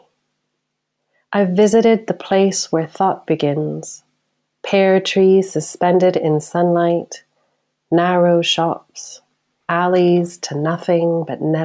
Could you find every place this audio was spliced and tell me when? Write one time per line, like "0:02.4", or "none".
none